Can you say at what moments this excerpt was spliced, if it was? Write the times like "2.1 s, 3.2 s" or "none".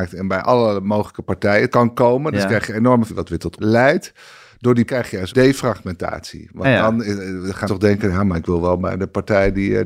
1.7 s, 3.1 s, 3.6 s, 4.9 s, 5.3 s, 6.6 s, 7.7 s